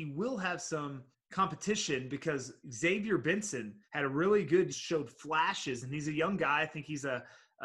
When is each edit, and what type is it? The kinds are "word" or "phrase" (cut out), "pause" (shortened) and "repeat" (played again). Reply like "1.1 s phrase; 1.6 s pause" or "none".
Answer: 1.1 s pause; 2.6 s pause; 3.8 s pause; 4.7 s phrase

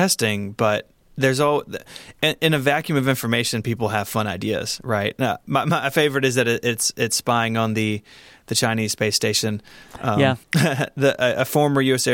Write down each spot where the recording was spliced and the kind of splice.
10.4 s pause

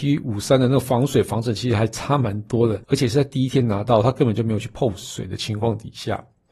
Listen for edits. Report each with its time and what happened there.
2.8 s pause

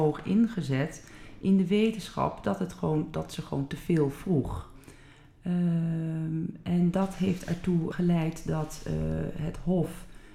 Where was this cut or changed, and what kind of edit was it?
7.9 s word

